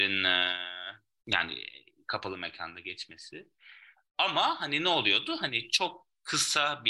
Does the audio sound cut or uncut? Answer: uncut